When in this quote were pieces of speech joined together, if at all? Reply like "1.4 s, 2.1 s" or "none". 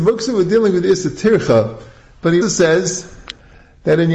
2.4 s